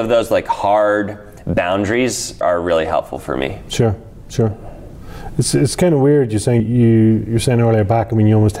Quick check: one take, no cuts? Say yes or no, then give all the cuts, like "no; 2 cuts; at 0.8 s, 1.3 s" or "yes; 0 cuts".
no; 2 cuts; at 2.4 s, 6.6 s